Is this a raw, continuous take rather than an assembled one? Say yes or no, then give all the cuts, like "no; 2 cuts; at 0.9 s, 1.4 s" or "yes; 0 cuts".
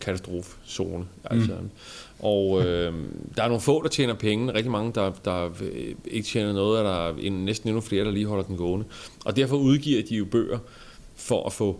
yes; 0 cuts